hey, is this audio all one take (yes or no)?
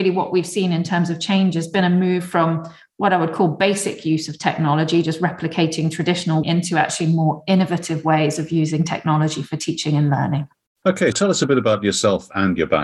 no